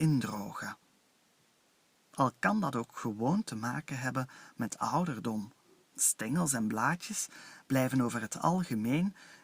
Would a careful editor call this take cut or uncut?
cut